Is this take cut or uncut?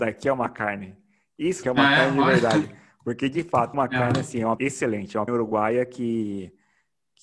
cut